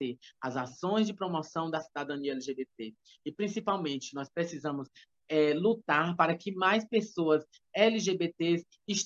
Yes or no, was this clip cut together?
no